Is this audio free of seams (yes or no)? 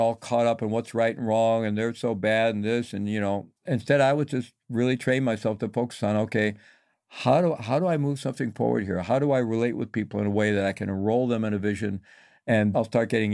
yes